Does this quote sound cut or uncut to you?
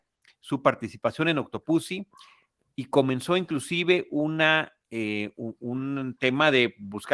uncut